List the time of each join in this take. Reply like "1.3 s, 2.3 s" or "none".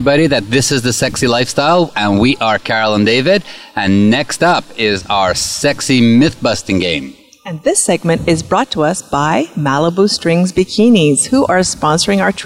none